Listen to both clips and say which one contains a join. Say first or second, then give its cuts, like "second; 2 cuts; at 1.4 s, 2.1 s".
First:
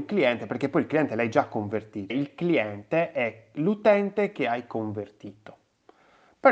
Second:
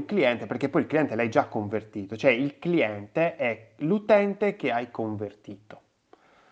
first; 1 cut; at 2.1 s